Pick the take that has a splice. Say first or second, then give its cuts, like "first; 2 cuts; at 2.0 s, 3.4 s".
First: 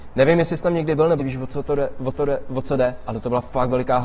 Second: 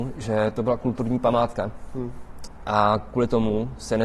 first; 2 cuts; at 1.2 s, 2.1 s